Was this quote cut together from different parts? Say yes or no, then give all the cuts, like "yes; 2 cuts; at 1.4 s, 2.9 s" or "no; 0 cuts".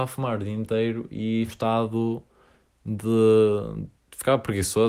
yes; 1 cut; at 1.5 s